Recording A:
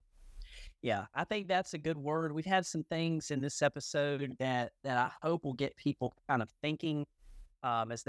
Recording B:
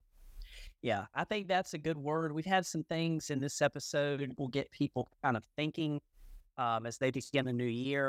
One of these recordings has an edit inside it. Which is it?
B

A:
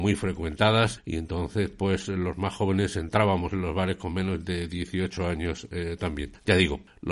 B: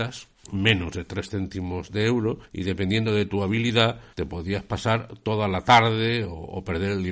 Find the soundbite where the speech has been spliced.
B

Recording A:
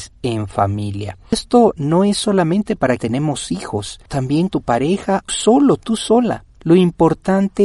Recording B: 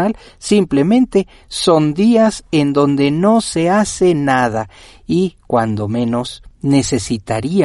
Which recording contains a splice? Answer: A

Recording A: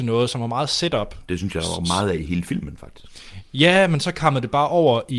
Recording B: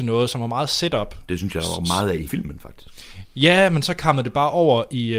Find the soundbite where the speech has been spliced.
B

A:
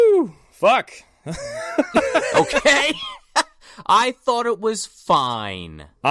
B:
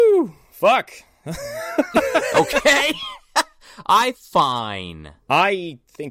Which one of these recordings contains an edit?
B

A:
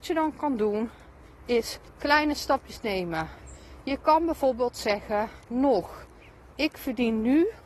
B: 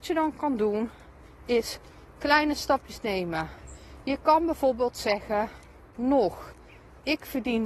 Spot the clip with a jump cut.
A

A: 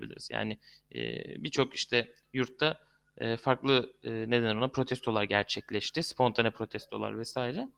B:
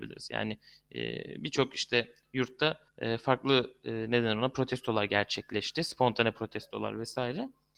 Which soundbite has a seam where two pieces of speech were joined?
B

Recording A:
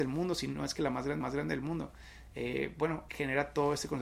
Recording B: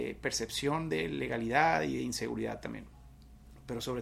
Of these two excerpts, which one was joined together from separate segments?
A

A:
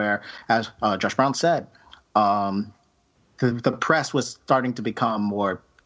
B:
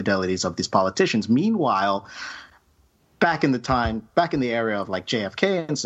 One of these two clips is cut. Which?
A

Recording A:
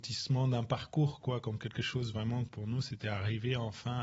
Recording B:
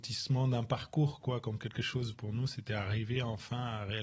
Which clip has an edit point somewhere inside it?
B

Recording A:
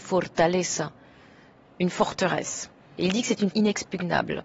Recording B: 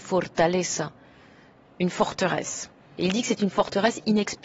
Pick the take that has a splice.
A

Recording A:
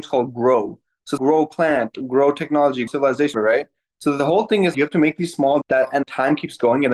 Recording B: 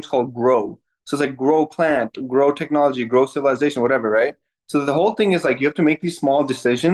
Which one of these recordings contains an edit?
A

